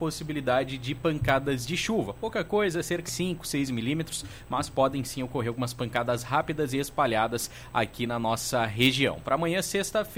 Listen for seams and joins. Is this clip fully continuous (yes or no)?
no